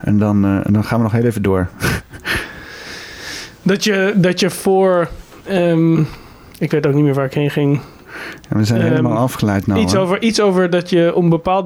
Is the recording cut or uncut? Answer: uncut